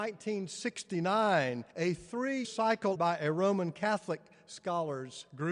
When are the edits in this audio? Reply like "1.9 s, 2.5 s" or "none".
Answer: 1.7 s, 2.4 s, 3.0 s